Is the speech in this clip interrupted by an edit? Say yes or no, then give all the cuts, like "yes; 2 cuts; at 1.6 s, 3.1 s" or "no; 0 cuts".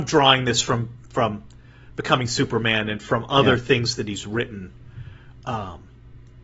no; 0 cuts